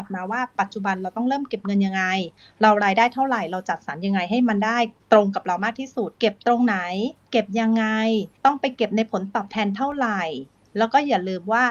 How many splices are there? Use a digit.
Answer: 3